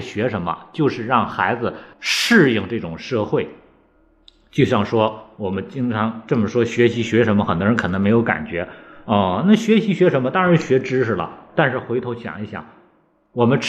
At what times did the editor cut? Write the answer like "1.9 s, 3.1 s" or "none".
1.9 s